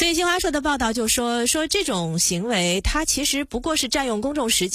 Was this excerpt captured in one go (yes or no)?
yes